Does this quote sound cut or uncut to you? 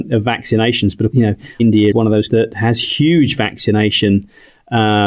cut